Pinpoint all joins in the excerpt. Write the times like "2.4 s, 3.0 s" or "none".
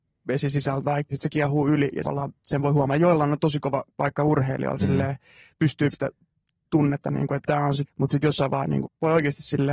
1.1 s, 2.0 s, 3.9 s, 4.8 s, 5.9 s, 7.5 s, 7.9 s, 8.5 s, 8.8 s